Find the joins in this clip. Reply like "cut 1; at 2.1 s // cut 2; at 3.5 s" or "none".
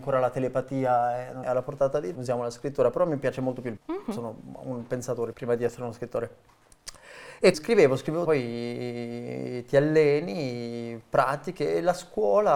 cut 1; at 1.4 s // cut 2; at 2.2 s // cut 3; at 3.8 s // cut 4; at 5.3 s // cut 5; at 7.5 s // cut 6; at 8.2 s